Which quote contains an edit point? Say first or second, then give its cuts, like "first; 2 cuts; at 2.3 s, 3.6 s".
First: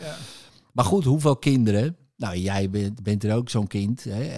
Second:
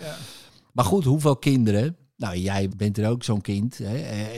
second; 1 cut; at 2.7 s